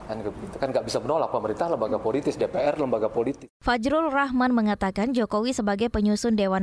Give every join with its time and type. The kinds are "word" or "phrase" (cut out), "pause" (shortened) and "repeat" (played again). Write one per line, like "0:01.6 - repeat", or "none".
none